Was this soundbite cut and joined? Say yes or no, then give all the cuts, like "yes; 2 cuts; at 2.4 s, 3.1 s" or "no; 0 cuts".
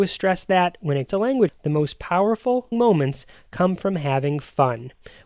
yes; 3 cuts; at 1.1 s, 1.5 s, 2.7 s